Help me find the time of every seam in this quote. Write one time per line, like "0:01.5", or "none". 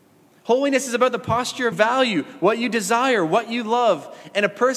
0:01.7